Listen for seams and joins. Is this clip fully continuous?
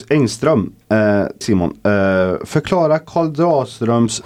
no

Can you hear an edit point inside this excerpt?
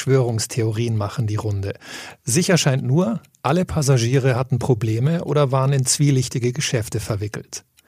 no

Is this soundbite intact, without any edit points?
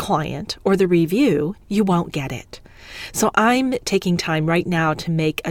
no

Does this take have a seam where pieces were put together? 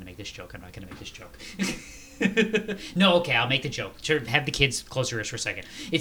no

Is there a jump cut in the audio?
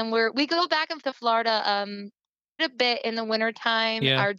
yes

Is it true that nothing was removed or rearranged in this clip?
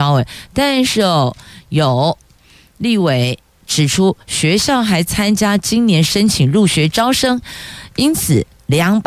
yes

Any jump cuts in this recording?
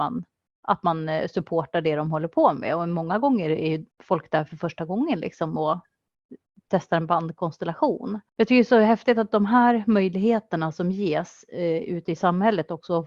yes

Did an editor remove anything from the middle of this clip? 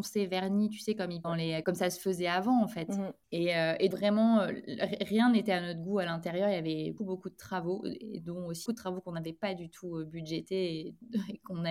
yes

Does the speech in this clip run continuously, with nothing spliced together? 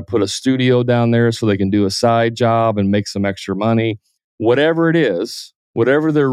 yes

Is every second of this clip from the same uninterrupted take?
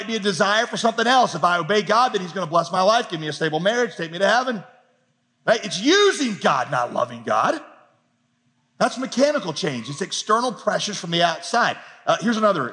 yes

